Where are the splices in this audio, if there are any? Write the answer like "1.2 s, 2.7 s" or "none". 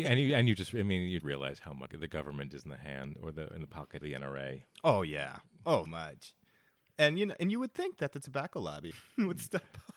1.2 s, 1.9 s, 4.0 s, 5.9 s, 8.9 s